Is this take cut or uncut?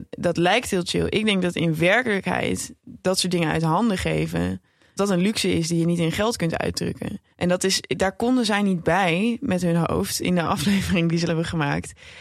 cut